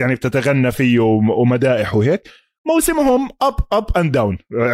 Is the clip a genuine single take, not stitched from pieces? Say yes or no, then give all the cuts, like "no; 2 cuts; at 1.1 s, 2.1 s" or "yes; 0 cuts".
yes; 0 cuts